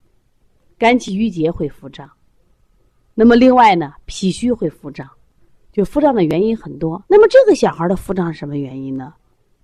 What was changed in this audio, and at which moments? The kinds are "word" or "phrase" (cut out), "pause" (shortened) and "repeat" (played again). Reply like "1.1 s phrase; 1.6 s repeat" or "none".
5.2 s pause; 7.1 s pause